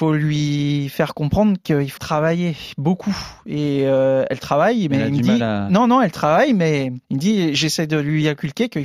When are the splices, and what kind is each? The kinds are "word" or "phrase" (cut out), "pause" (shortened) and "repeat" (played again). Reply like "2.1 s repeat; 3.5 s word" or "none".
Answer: 2.0 s word; 7.0 s pause